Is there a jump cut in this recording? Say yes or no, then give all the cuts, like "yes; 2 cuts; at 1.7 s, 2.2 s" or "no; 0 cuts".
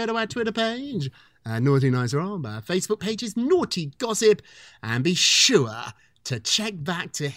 no; 0 cuts